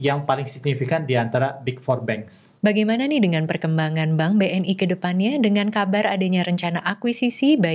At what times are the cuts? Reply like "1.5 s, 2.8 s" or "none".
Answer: 2.6 s